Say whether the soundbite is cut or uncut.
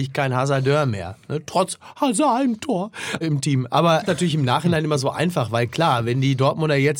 cut